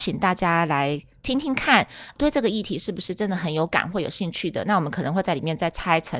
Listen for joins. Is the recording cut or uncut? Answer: cut